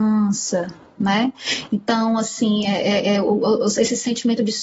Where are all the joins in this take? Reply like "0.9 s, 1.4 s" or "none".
none